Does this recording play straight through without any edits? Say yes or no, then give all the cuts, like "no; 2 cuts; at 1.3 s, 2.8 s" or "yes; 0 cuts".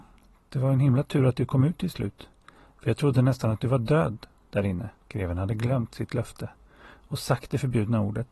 no; 1 cut; at 5.0 s